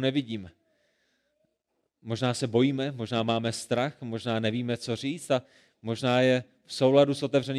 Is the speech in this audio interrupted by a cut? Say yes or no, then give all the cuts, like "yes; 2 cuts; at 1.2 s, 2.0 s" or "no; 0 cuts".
no; 0 cuts